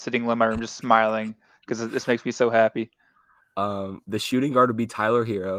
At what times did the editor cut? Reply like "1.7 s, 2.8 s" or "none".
none